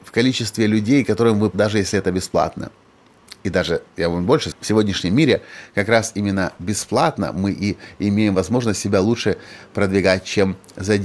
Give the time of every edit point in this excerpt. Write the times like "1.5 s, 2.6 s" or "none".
1.5 s, 3.4 s, 4.5 s